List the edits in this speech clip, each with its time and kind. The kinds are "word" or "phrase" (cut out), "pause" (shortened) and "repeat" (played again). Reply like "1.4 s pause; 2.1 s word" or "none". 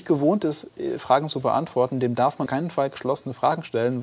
2.5 s word